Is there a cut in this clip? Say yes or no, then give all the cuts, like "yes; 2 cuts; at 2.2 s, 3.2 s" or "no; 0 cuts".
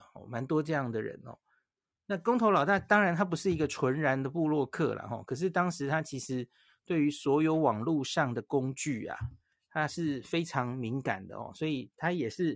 no; 0 cuts